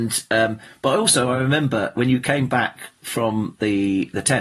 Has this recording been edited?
no; 0 cuts

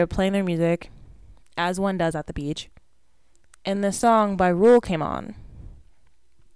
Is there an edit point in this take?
no; 0 cuts

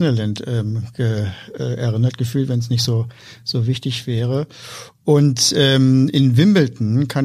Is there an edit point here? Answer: no; 0 cuts

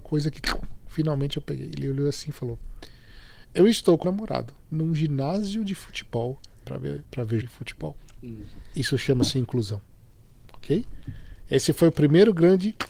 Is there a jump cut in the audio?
yes; 4 cuts; at 4.0 s, 4.6 s, 6.6 s, 7.4 s

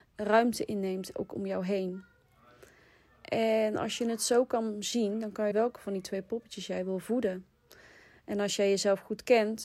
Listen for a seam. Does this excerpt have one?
yes; 1 cut; at 5.5 s

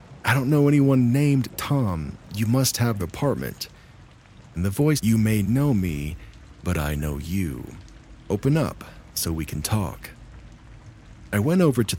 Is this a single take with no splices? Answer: no; 3 cuts; at 3.0 s, 5.0 s, 5.4 s

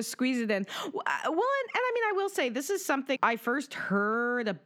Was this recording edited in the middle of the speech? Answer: yes; 1 cut; at 3.2 s

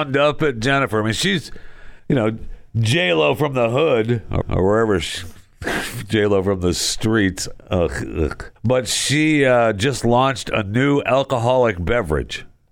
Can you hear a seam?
yes; 3 cuts; at 2.0 s, 4.4 s, 8.6 s

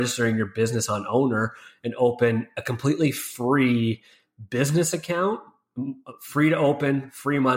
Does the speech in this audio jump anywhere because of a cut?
no; 0 cuts

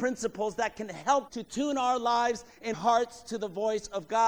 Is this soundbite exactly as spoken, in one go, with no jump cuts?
no; 2 cuts; at 1.3 s, 2.7 s

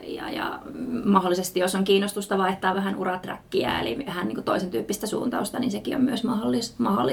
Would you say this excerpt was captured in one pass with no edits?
yes; 0 cuts

